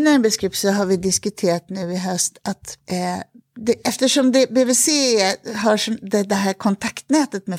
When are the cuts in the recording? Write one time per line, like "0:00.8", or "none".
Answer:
0:02.8

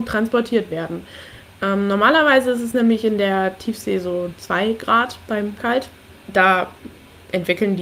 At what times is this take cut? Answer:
0:05.6

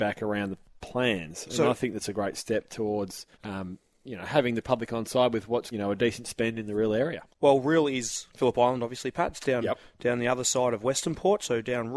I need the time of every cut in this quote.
0:03.3
0:05.7
0:07.3
0:08.3

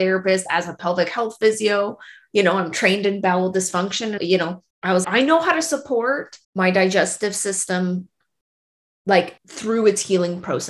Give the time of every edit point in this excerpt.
0:04.2
0:04.7
0:05.0
0:06.4
0:09.4

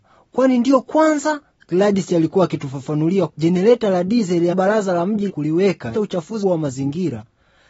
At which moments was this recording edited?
0:03.3
0:04.5
0:05.3
0:05.9
0:06.4

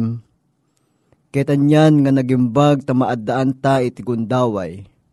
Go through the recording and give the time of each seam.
none

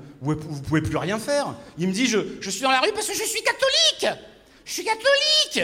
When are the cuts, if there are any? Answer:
none

